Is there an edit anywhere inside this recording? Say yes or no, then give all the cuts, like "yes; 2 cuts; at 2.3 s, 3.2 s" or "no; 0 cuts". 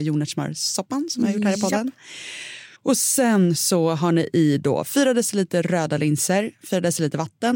yes; 1 cut; at 2.7 s